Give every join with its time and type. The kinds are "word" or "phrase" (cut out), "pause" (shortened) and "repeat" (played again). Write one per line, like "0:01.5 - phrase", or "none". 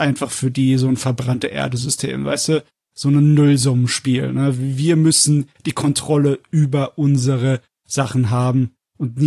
none